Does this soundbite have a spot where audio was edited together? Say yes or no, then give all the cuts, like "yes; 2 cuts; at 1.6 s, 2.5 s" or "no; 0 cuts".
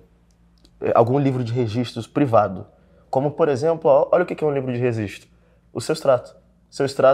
no; 0 cuts